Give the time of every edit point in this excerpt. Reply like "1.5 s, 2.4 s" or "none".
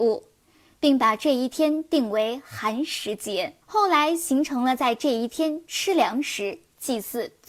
3.6 s